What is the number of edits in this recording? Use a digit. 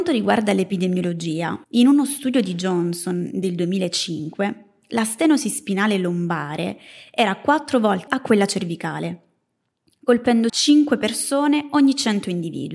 3